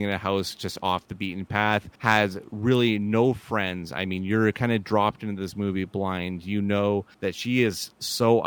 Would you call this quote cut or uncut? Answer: cut